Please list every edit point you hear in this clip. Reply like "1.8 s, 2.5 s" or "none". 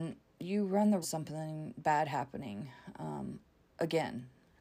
1.0 s